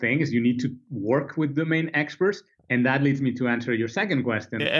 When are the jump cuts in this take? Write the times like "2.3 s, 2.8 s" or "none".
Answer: none